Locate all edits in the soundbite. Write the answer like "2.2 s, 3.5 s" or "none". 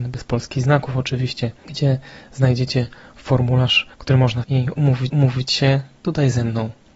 1.6 s, 3.9 s, 4.4 s, 5.1 s